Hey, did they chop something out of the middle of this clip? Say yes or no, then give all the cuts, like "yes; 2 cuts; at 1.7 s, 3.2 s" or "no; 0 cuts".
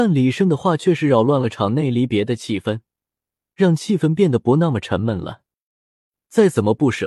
no; 0 cuts